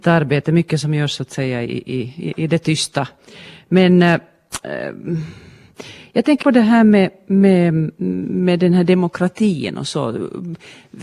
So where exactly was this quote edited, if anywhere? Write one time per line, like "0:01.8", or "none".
0:06.4